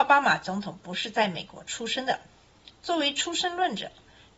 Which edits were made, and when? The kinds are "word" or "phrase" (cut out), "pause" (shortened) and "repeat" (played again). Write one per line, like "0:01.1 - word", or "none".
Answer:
none

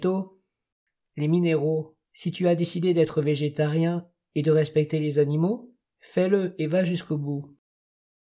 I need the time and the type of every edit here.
0:02.0 - pause
0:05.8 - pause

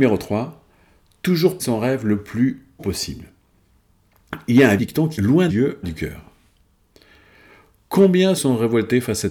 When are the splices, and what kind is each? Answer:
0:01.6 - word
0:02.8 - word
0:04.8 - word
0:05.1 - word
0:05.5 - word
0:05.8 - word
0:08.4 - word

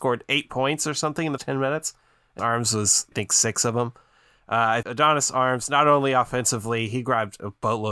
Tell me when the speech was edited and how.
0:01.4 - word
0:02.4 - word
0:03.1 - word
0:04.8 - word

